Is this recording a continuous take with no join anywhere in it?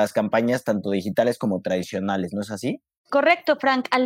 yes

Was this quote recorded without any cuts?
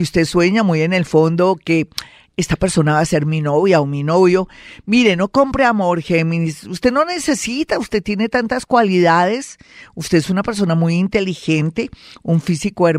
yes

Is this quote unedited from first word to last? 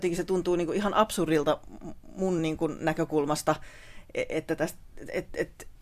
yes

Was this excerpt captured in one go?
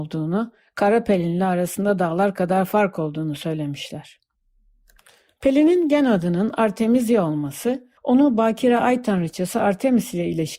no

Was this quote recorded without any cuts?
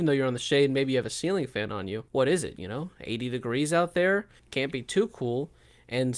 no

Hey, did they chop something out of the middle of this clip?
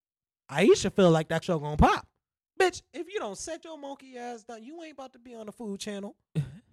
yes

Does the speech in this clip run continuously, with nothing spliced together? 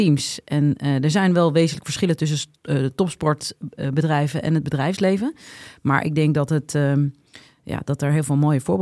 yes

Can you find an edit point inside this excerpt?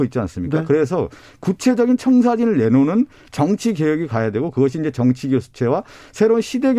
no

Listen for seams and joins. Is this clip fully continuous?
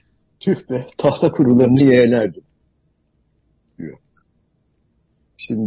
no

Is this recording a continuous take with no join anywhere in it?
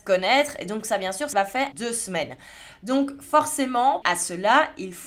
no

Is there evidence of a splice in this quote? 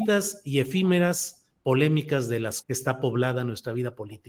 yes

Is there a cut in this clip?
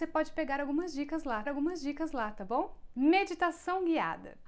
yes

